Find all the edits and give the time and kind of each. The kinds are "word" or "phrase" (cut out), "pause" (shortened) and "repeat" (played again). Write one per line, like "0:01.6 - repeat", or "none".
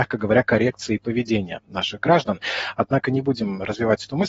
none